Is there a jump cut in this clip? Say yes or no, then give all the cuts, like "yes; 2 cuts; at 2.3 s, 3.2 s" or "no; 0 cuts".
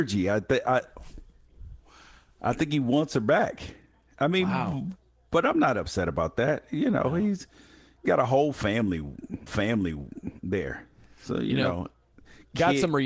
yes; 2 cuts; at 8.0 s, 9.5 s